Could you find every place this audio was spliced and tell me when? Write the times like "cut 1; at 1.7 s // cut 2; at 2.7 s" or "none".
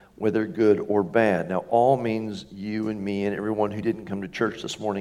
none